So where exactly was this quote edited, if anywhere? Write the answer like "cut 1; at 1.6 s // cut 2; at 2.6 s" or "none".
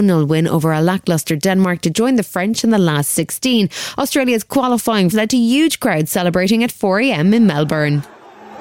cut 1; at 5.1 s

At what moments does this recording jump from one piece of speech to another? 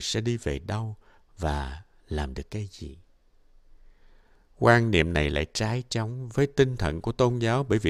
none

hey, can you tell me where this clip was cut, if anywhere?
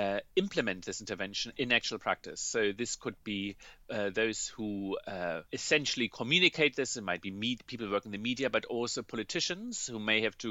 cut 1; at 3.8 s // cut 2; at 5.5 s

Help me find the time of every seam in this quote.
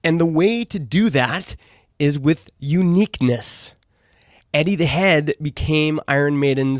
none

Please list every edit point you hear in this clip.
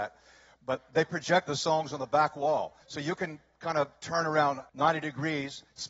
cut 1; at 1.5 s // cut 2; at 2.8 s // cut 3; at 4.7 s

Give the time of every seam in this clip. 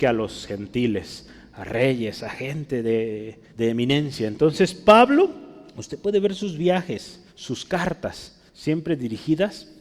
cut 1; at 3.5 s // cut 2; at 5.7 s // cut 3; at 7.3 s // cut 4; at 8.5 s

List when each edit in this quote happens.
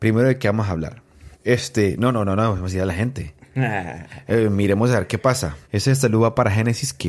cut 1; at 1.3 s // cut 2; at 5.6 s

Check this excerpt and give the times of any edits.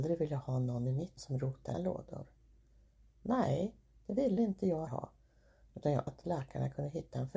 cut 1; at 1.2 s // cut 2; at 1.7 s // cut 3; at 4.4 s // cut 4; at 4.9 s // cut 5; at 6.1 s

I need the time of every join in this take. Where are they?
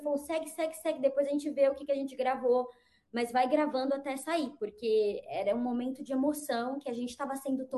none

